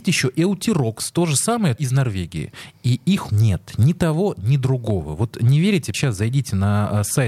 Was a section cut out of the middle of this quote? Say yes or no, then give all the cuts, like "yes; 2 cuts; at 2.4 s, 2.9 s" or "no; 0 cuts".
yes; 3 cuts; at 1.8 s, 3.3 s, 5.9 s